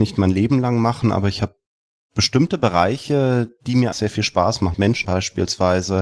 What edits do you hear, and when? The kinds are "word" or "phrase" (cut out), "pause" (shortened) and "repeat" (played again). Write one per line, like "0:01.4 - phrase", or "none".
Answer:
0:03.9 - word
0:04.7 - word
0:05.0 - word